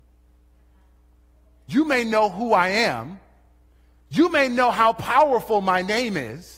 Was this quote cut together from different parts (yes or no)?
no